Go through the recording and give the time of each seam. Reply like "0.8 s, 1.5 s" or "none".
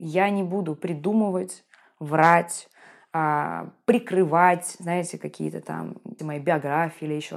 6.2 s